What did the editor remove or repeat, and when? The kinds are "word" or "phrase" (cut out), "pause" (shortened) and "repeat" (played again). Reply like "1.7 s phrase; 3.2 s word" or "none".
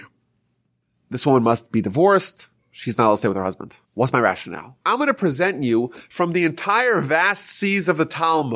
3.8 s pause; 4.8 s pause